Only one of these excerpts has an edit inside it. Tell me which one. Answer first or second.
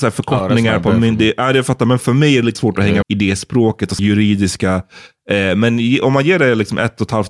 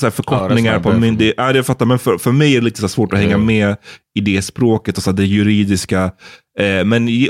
first